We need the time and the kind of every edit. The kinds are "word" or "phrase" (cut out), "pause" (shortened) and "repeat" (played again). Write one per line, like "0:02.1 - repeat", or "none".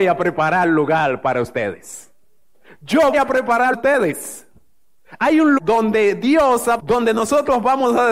0:03.1 - word
0:03.7 - phrase
0:05.6 - word
0:06.8 - word